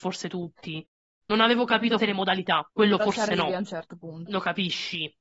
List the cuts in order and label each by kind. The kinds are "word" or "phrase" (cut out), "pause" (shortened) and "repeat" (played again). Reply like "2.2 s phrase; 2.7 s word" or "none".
2.0 s word; 2.7 s pause; 4.3 s phrase